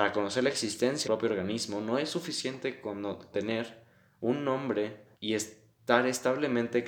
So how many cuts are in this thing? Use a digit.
3